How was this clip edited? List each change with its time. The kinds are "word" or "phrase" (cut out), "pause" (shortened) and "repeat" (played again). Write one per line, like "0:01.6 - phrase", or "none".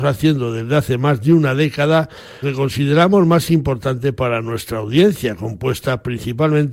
0:02.4 - word